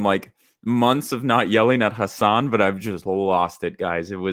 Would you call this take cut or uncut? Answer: uncut